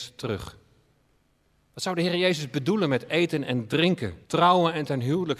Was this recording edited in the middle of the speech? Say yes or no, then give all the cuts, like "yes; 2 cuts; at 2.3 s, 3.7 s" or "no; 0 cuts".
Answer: yes; 2 cuts; at 1.4 s, 4.2 s